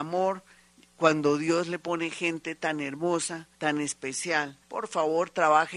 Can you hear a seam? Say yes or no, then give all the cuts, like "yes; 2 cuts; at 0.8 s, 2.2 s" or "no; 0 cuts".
yes; 2 cuts; at 3.5 s, 4.6 s